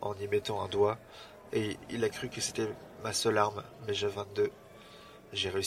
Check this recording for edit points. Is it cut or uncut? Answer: cut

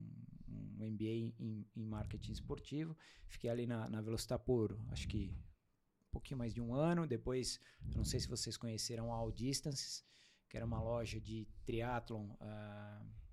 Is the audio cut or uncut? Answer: uncut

